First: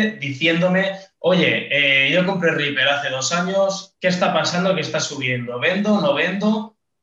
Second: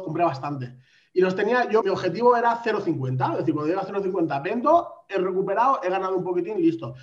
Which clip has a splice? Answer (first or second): second